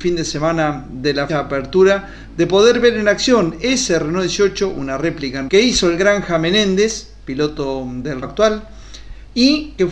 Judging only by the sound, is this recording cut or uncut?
cut